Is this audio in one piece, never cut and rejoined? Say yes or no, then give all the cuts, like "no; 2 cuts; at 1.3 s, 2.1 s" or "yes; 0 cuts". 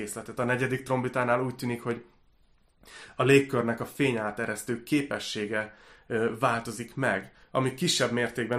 yes; 0 cuts